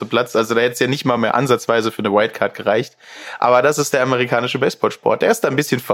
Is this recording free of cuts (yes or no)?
yes